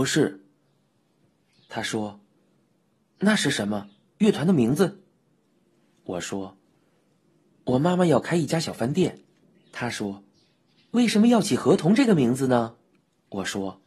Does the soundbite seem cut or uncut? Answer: uncut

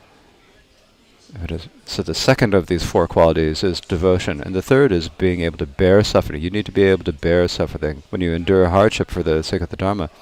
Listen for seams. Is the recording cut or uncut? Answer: cut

